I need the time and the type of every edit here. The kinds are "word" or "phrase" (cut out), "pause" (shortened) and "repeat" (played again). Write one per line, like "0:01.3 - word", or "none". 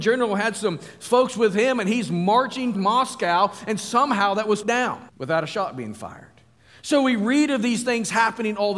0:02.7 - word
0:04.6 - word
0:05.1 - pause